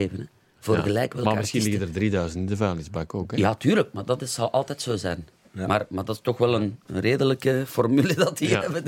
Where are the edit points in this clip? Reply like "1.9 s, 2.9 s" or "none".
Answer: none

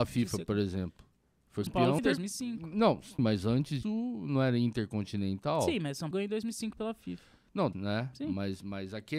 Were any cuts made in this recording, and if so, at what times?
1.7 s, 2.0 s, 3.2 s, 3.8 s, 6.1 s, 7.7 s

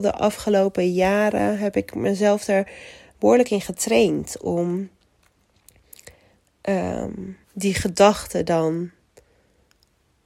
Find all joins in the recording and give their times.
7.4 s

